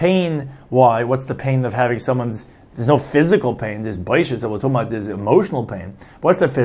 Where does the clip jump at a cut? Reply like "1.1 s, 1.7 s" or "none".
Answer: none